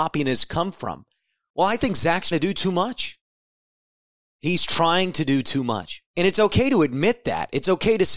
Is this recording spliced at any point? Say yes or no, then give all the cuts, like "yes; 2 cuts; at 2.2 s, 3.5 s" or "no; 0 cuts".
yes; 2 cuts; at 2.3 s, 6.1 s